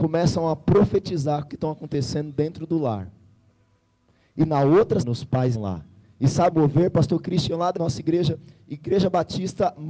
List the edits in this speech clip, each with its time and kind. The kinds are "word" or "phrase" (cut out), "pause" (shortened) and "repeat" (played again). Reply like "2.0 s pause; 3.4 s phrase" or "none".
1.5 s word; 5.0 s word; 5.5 s word; 6.5 s word; 7.8 s word